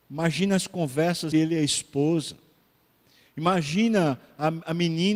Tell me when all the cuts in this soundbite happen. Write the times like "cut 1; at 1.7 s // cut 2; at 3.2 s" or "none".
cut 1; at 1.3 s